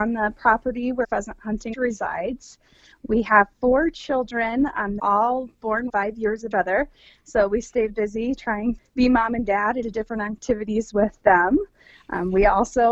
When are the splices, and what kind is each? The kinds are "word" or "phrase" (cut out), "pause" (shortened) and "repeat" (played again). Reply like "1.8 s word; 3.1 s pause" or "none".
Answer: 1.0 s word; 1.7 s word; 5.0 s word; 5.9 s word; 6.5 s word; 7.9 s word; 8.8 s word; 9.8 s word